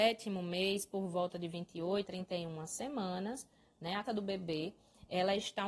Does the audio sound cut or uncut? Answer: cut